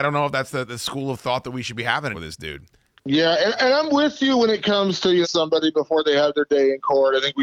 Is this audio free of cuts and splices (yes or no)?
no